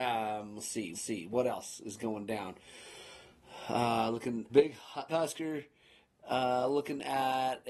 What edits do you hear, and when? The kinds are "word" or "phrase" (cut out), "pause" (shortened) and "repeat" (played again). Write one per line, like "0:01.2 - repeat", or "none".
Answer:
0:00.9 - repeat
0:04.5 - word
0:05.1 - phrase